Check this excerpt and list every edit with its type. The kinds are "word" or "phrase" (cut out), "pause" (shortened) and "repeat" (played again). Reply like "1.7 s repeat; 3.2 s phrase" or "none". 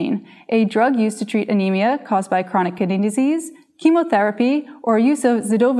none